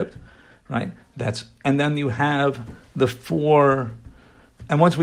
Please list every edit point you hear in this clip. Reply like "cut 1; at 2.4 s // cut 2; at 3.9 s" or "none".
none